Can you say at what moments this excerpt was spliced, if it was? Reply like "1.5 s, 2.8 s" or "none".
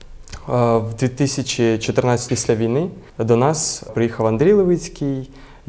2.3 s, 3.1 s, 3.9 s